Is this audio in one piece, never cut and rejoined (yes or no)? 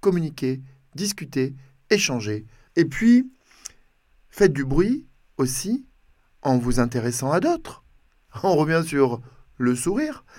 yes